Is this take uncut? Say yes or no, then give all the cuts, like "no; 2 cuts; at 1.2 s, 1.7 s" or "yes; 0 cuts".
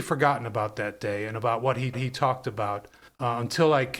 no; 2 cuts; at 1.9 s, 3.1 s